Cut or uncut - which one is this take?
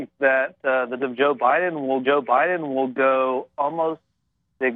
cut